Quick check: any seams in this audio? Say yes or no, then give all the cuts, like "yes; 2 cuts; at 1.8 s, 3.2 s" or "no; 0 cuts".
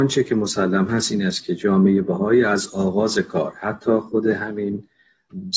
no; 0 cuts